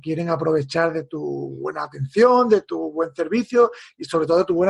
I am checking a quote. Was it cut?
no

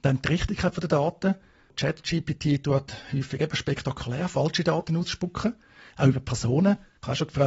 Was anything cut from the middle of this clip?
no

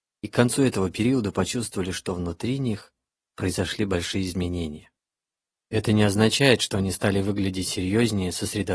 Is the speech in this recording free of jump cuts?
yes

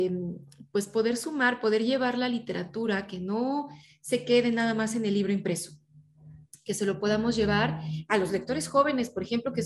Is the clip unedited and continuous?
yes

